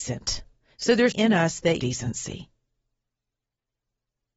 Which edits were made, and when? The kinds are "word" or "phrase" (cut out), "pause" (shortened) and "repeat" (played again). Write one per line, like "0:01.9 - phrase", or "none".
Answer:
0:01.1 - word
0:01.8 - phrase